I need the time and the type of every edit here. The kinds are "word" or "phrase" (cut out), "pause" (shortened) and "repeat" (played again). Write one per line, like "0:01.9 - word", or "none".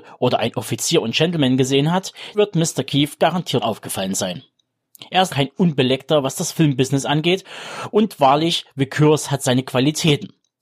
0:02.3 - word
0:03.6 - word
0:05.3 - word